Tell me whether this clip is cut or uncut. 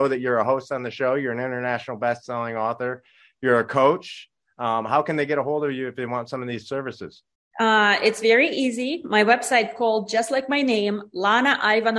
uncut